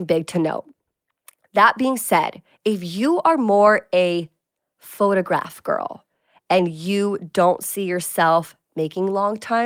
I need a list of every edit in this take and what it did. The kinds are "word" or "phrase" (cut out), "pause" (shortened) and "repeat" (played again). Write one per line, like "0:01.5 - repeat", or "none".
none

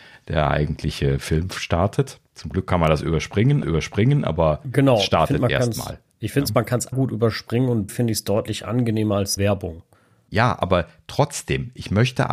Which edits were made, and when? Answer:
0:03.6 - repeat
0:06.9 - word
0:07.9 - word
0:09.4 - word
0:09.9 - pause

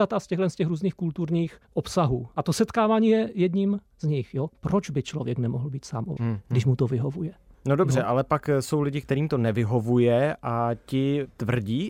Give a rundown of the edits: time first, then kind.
0:01.6 - pause
0:06.2 - word

